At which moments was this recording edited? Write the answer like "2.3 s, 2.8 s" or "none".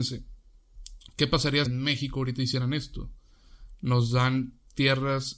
1.7 s